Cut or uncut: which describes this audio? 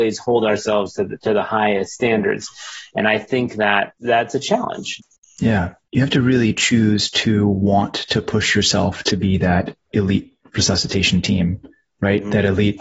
uncut